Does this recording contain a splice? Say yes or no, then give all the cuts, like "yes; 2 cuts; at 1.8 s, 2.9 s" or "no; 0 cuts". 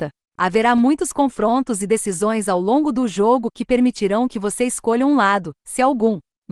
no; 0 cuts